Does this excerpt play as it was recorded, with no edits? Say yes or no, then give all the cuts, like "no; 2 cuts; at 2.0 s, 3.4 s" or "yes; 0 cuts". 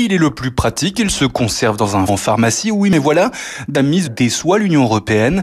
no; 3 cuts; at 2.1 s, 3.7 s, 4.1 s